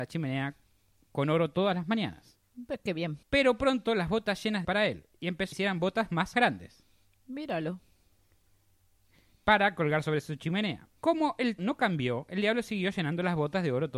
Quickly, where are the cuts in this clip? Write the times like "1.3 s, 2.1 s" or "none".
3.2 s, 4.6 s, 5.5 s, 6.3 s, 11.0 s, 11.6 s